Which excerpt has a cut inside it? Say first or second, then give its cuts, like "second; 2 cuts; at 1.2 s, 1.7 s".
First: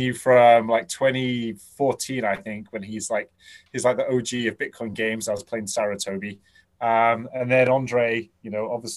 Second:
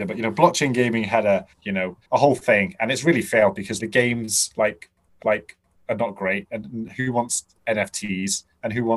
second; 4 cuts; at 1.5 s, 2.0 s, 3.8 s, 5.2 s